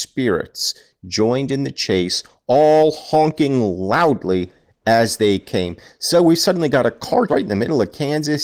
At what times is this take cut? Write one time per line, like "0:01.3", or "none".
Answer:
0:07.3